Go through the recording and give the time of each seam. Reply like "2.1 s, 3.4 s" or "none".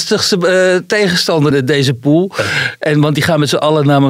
1.5 s

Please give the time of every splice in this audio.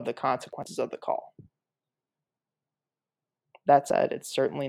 none

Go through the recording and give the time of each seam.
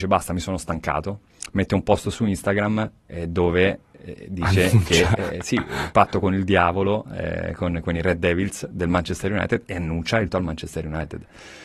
10.3 s

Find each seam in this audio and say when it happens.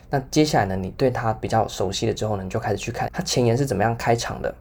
3.1 s

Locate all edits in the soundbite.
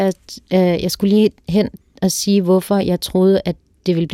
none

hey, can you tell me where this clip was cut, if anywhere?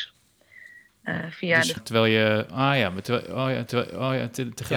1.8 s, 3.7 s

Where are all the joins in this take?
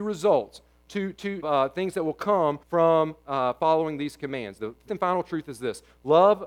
1.4 s, 2.6 s, 4.9 s

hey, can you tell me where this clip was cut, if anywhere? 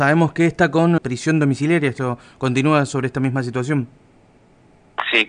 1.0 s

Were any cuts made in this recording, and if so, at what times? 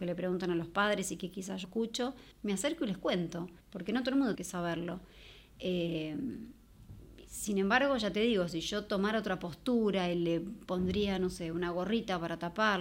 1.6 s, 2.3 s, 3.6 s, 4.3 s

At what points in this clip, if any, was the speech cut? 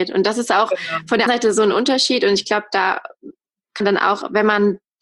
1.3 s, 3.8 s

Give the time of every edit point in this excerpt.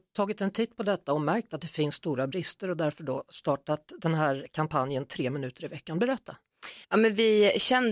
6.8 s

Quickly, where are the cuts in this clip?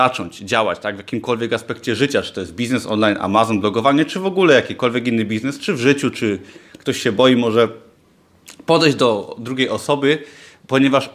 none

